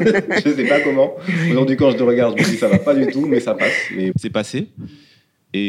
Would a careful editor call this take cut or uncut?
cut